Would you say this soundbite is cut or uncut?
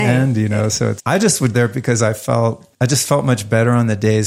cut